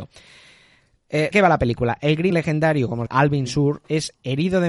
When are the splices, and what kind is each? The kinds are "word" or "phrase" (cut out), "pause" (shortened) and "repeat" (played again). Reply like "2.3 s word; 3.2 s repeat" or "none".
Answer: 1.3 s word; 2.3 s word; 3.1 s word